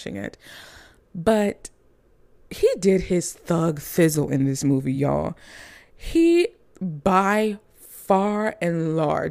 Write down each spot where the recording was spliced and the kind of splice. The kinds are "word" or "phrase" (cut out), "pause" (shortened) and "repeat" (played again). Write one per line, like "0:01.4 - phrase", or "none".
none